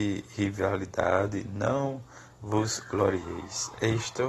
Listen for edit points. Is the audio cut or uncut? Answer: uncut